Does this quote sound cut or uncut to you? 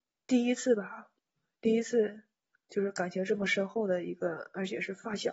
uncut